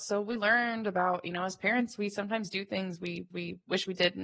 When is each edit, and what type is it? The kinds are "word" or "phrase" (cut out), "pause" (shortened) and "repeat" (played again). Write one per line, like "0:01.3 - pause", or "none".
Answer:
0:03.3 - repeat